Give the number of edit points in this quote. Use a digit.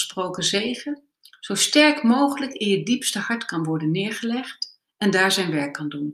0